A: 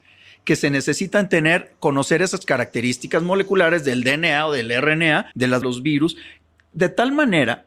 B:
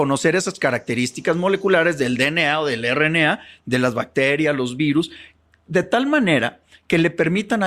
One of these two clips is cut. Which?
A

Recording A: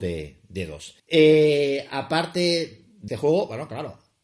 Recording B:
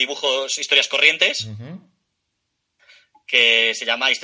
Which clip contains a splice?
A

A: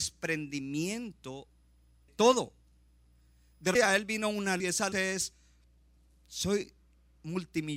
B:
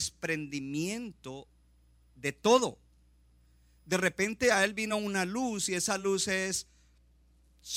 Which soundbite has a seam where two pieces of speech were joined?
A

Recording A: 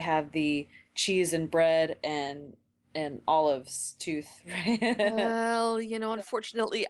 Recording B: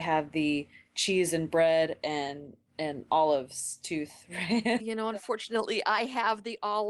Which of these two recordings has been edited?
B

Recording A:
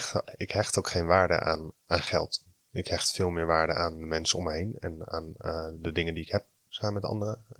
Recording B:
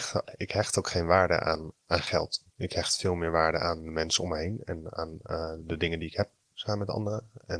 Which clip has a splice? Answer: B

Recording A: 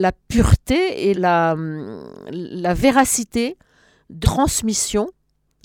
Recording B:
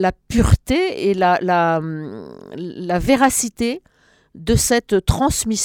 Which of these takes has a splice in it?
A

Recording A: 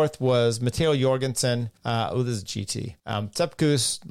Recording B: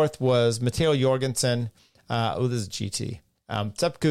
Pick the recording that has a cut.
A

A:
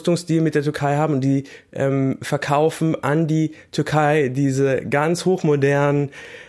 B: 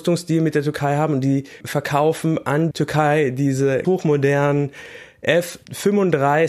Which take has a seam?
B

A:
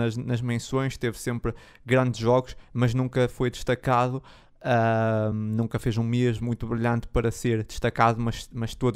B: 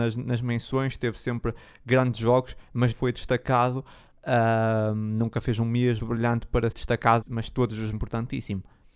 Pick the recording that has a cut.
B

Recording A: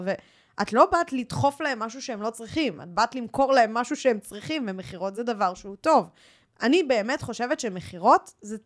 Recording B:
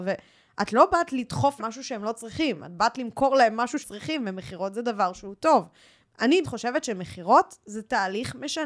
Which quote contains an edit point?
B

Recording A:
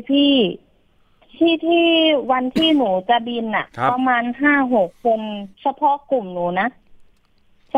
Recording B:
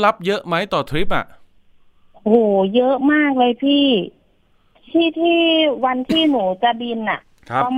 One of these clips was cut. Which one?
A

